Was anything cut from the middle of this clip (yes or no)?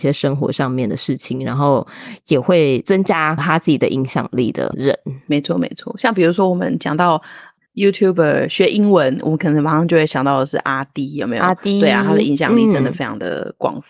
no